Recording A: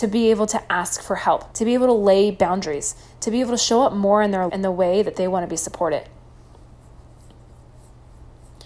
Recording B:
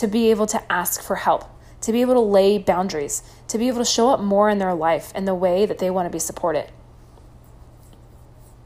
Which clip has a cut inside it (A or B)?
A